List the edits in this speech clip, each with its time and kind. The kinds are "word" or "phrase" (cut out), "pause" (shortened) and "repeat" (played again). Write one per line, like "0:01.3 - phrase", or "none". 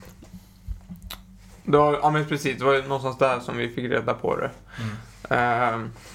none